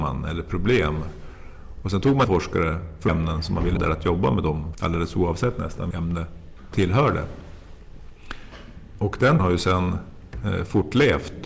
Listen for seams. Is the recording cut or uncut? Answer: cut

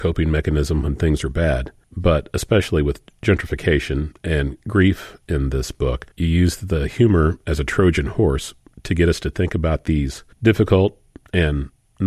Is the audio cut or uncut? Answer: cut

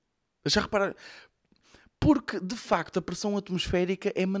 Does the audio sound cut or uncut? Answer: uncut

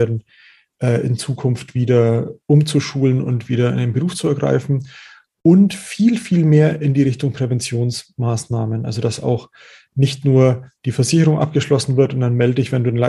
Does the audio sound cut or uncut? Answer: uncut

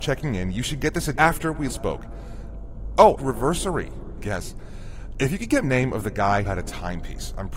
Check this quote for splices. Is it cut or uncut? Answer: cut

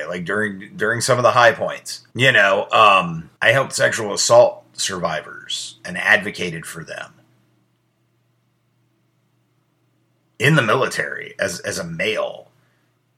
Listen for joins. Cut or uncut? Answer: cut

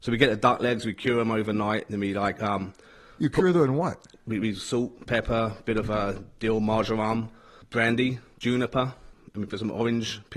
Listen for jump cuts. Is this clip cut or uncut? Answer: uncut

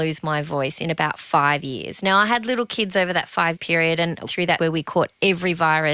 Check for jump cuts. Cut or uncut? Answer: cut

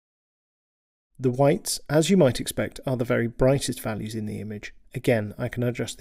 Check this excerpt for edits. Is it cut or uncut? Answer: uncut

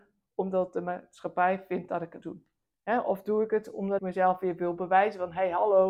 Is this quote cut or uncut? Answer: cut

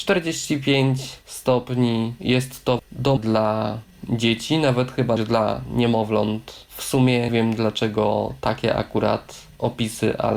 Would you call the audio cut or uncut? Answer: cut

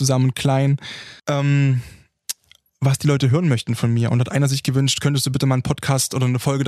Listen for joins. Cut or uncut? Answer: cut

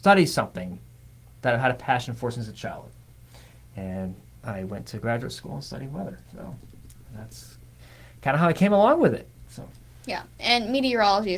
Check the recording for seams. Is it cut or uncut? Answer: uncut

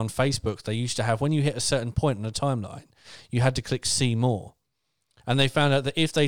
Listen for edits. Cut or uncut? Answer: uncut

